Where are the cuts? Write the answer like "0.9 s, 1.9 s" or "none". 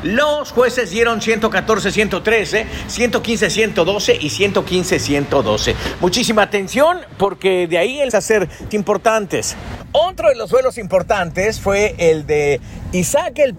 8.1 s, 8.7 s